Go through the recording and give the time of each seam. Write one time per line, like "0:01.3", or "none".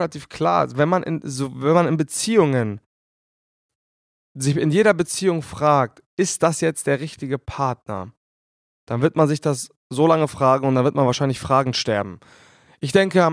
none